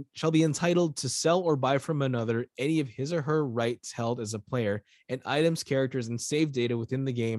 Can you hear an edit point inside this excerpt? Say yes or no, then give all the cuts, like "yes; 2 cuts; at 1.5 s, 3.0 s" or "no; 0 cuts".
no; 0 cuts